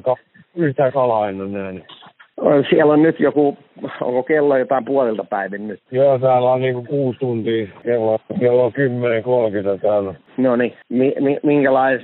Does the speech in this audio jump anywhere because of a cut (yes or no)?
no